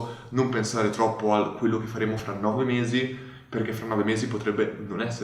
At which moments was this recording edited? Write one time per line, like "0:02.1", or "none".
none